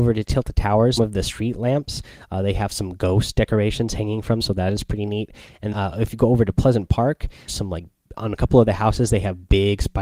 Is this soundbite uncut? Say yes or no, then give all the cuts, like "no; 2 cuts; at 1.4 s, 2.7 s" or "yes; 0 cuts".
no; 5 cuts; at 1.0 s, 4.4 s, 5.7 s, 7.5 s, 8.2 s